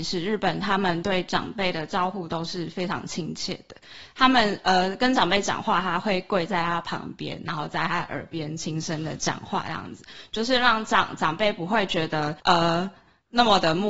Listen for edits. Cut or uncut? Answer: cut